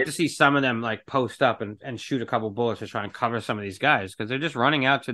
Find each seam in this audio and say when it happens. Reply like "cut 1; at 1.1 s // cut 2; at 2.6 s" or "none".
none